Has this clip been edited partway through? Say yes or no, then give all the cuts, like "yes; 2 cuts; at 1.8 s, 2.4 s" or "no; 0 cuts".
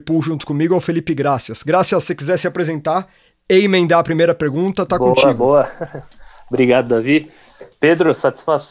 no; 0 cuts